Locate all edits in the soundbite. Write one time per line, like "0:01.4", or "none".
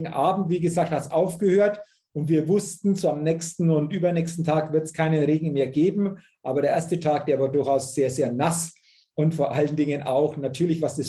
none